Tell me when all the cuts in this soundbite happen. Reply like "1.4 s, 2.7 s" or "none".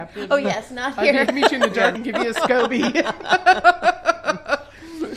1.3 s, 1.9 s